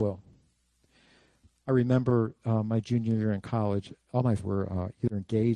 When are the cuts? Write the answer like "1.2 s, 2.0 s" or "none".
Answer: 4.4 s

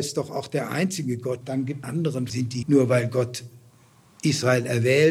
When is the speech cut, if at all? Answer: 1.4 s, 1.8 s, 2.3 s, 2.6 s

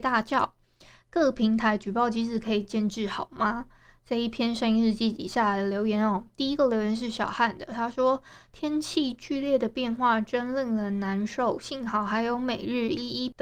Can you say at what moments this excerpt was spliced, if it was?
none

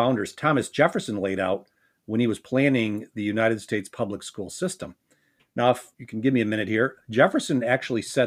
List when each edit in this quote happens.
5.9 s

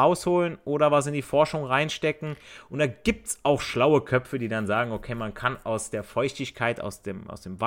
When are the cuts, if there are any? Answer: none

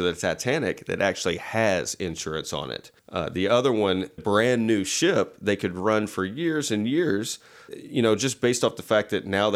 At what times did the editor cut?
3.0 s, 4.2 s, 7.7 s

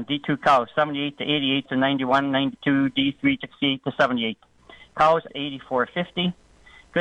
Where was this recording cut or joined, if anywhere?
1.7 s, 3.4 s, 5.3 s

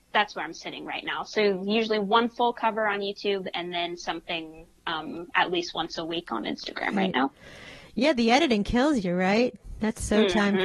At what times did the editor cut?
none

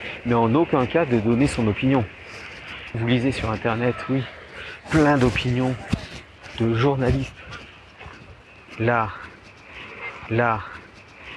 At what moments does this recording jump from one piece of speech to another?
2.9 s, 4.8 s, 10.3 s

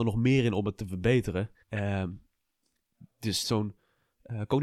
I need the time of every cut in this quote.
1.6 s, 3.4 s

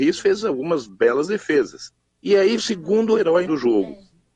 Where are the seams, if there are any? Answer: 2.1 s, 2.6 s, 3.5 s

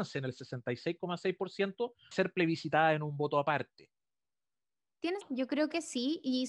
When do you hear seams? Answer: 2.1 s, 5.2 s

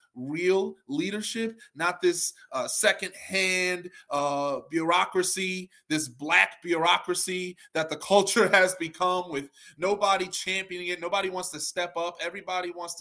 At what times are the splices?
none

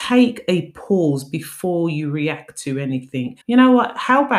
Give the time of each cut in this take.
3.4 s

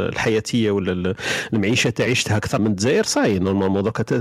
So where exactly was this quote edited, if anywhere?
2.1 s, 2.6 s

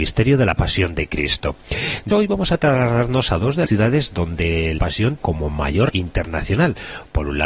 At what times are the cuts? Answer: 2.1 s, 3.7 s, 4.8 s, 5.2 s, 5.9 s

